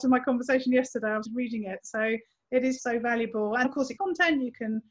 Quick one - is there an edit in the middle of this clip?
yes; 4 cuts; at 1.2 s, 2.8 s, 3.6 s, 4.0 s

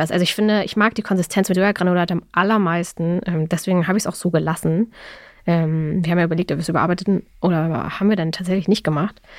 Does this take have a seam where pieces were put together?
yes; 1 cut; at 1.5 s

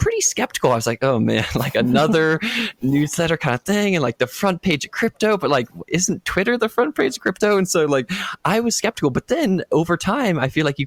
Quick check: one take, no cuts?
yes; 0 cuts

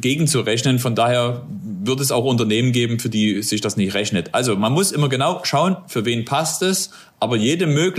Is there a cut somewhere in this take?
no; 0 cuts

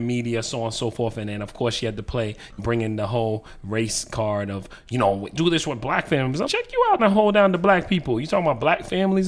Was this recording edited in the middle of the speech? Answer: yes; 4 cuts; at 2.6 s, 5.3 s, 6.5 s, 7.0 s

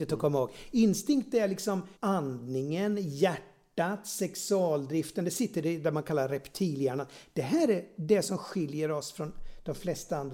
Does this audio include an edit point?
yes; 1 cut; at 2.0 s

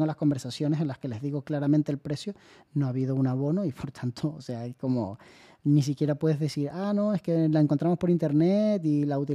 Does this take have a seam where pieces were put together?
no; 0 cuts

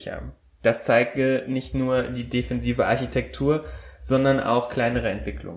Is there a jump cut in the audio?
no; 0 cuts

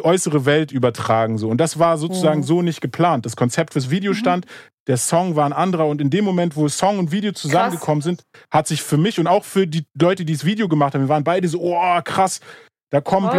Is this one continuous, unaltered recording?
yes; 0 cuts

